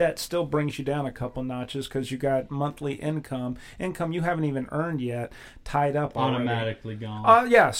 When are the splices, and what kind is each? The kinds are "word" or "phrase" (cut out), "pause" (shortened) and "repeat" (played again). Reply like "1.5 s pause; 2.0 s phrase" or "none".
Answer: none